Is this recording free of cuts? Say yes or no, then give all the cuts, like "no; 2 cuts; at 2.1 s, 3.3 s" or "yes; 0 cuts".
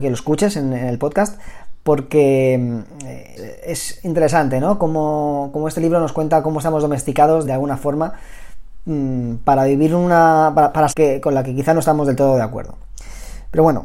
no; 3 cuts; at 3.4 s, 7.4 s, 10.9 s